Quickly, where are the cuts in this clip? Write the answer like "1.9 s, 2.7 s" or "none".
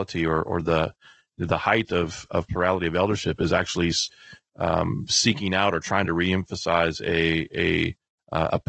none